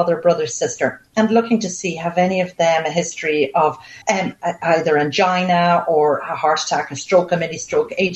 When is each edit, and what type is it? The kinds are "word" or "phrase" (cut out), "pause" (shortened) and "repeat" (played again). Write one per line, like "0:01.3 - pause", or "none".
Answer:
0:04.0 - pause